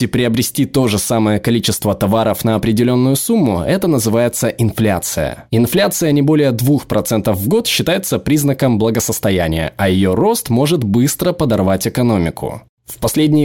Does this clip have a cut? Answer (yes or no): no